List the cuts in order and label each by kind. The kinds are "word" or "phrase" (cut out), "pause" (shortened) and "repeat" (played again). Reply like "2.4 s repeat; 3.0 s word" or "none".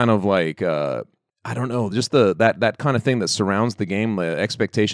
none